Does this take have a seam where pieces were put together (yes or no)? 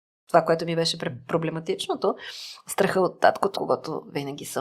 yes